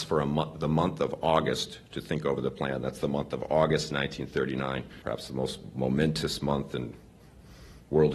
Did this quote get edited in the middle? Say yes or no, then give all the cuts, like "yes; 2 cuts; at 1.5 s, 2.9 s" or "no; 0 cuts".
yes; 1 cut; at 5.0 s